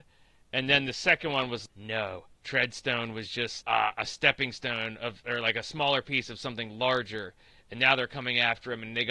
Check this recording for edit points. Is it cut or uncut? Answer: cut